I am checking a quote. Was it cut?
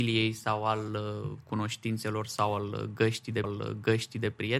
yes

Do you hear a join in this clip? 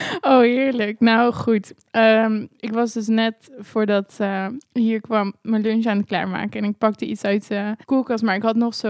yes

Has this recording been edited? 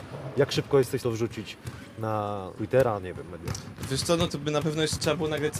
yes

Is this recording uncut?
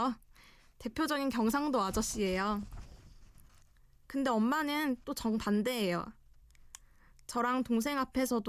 yes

